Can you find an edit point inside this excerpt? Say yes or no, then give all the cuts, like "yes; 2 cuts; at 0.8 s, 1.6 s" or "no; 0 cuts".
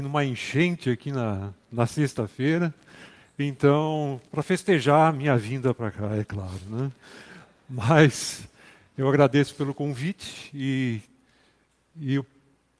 no; 0 cuts